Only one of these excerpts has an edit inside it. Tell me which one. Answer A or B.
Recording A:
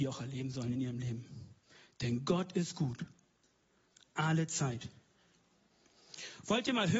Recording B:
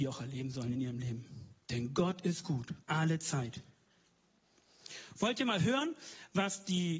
B